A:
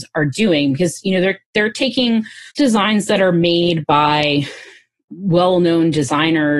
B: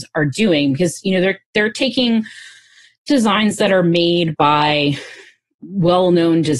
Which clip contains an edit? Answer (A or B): A